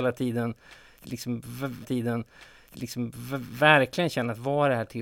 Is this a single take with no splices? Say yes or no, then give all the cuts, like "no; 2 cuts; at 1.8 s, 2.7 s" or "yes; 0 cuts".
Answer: no; 1 cut; at 1.8 s